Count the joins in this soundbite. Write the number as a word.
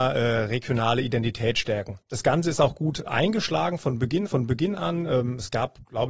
three